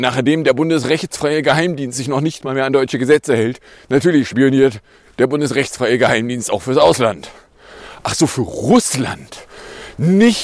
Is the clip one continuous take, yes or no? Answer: yes